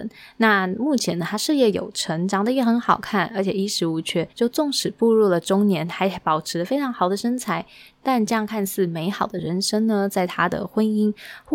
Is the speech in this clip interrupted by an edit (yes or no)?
yes